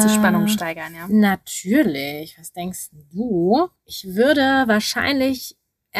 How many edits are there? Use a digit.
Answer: 0